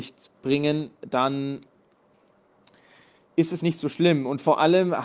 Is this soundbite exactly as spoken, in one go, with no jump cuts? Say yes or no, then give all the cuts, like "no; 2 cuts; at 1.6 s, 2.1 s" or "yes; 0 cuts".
no; 1 cut; at 3.6 s